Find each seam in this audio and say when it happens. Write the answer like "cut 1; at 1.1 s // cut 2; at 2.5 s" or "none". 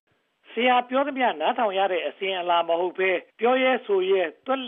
cut 1; at 3.3 s